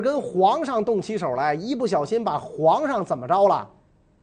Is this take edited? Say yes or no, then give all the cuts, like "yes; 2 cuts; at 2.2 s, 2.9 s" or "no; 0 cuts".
no; 0 cuts